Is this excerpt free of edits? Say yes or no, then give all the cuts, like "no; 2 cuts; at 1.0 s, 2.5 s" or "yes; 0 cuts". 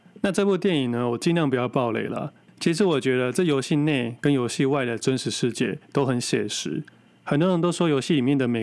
yes; 0 cuts